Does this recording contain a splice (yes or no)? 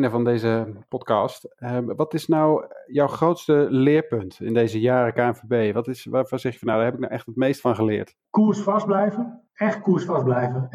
no